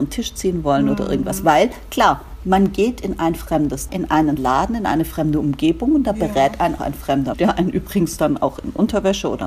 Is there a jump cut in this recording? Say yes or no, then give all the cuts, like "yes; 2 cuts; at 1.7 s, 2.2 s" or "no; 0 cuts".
yes; 4 cuts; at 3.9 s, 4.4 s, 6.8 s, 7.3 s